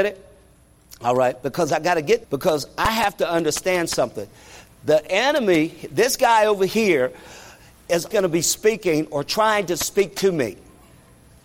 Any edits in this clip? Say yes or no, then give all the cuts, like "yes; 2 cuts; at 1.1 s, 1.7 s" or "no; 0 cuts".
yes; 2 cuts; at 2.2 s, 8.1 s